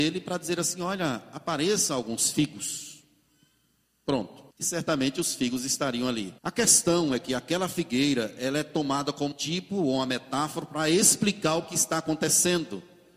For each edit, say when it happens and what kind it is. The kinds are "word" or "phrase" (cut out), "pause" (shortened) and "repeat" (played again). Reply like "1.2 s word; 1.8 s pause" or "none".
4.5 s pause; 6.4 s pause; 9.3 s word